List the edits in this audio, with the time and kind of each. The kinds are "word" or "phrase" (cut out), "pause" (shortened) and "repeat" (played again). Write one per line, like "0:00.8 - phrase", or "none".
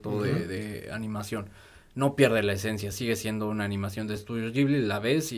none